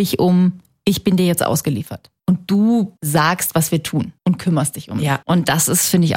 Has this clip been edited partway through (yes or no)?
yes